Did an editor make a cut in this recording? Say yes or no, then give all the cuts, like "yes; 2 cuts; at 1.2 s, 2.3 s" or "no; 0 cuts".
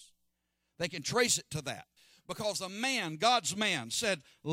yes; 1 cut; at 2.0 s